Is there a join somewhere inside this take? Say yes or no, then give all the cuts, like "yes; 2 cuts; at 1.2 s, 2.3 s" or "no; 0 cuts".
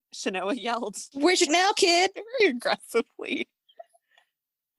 yes; 1 cut; at 1.5 s